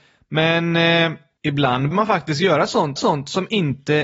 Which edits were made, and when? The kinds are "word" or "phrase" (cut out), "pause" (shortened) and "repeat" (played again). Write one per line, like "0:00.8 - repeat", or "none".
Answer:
0:01.9 - word
0:03.0 - repeat